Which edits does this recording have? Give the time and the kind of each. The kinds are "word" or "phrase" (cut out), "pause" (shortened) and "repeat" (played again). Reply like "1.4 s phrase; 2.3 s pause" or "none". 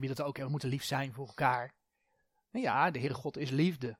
none